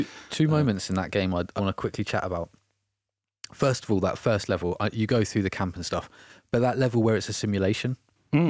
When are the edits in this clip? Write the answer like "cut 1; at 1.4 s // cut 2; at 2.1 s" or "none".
cut 1; at 1.6 s

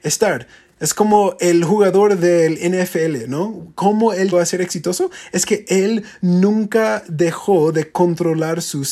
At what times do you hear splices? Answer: cut 1; at 4.3 s

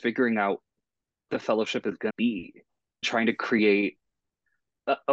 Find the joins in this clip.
cut 1; at 1.3 s // cut 2; at 2.1 s // cut 3; at 3.0 s

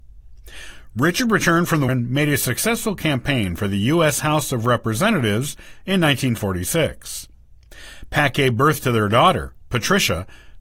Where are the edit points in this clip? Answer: cut 1; at 1.9 s

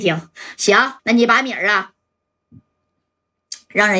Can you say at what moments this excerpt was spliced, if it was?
cut 1; at 1.0 s

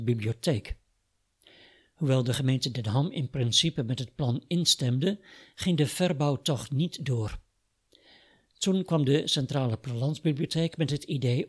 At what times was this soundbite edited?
none

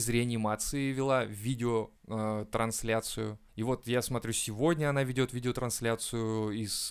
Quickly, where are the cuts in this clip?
cut 1; at 2.0 s // cut 2; at 3.5 s

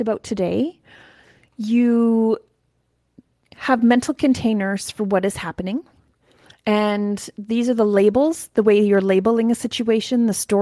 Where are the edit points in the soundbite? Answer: none

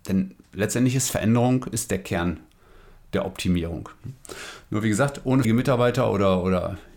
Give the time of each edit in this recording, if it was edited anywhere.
cut 1; at 5.4 s

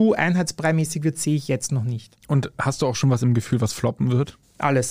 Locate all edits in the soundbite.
none

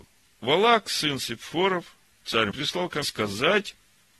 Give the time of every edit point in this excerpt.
cut 1; at 2.5 s // cut 2; at 3.0 s

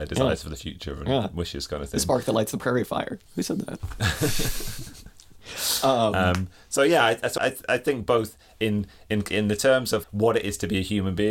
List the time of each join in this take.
cut 1; at 7.4 s // cut 2; at 10.0 s

